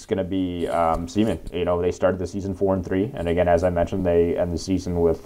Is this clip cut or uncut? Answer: uncut